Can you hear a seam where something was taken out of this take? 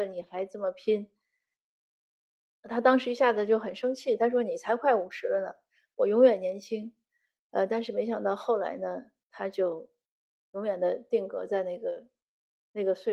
no; 0 cuts

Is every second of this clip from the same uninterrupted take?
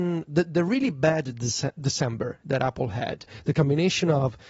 yes; 0 cuts

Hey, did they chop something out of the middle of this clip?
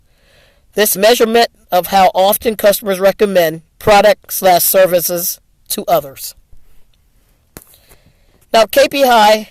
yes; 2 cuts; at 0.9 s, 3.7 s

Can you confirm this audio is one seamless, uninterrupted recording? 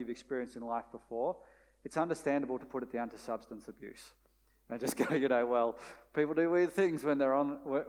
yes; 0 cuts

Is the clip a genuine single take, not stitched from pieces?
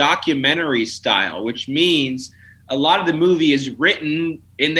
yes; 0 cuts

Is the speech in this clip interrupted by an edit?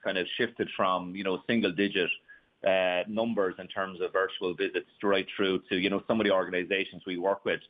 no; 0 cuts

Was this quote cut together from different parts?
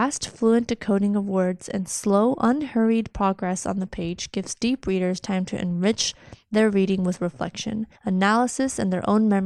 yes; 1 cut; at 8.0 s

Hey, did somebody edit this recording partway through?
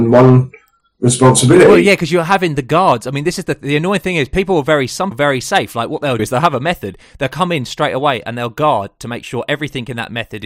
yes; 2 cuts; at 5.1 s, 6.2 s

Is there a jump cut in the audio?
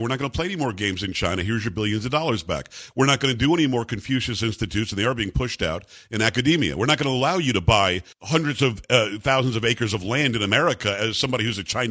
yes; 1 cut; at 8.1 s

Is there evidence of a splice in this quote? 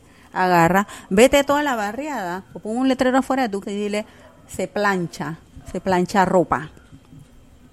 yes; 1 cut; at 3.6 s

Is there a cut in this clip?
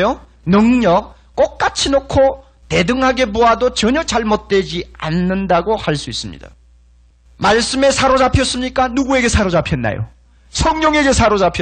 no; 0 cuts

